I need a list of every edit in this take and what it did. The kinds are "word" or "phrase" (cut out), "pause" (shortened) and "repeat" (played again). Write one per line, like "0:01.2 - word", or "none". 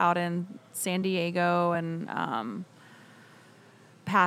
none